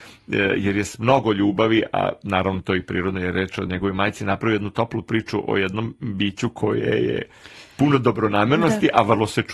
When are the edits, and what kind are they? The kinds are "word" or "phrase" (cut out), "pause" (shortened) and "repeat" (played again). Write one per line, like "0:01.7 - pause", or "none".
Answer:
none